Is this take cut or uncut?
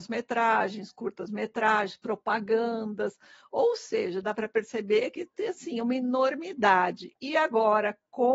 uncut